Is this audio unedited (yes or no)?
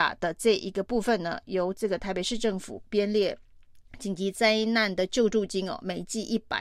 no